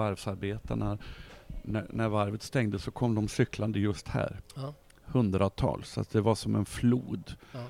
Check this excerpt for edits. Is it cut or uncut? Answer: uncut